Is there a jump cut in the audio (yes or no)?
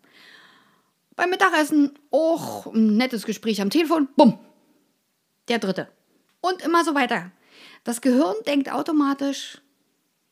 no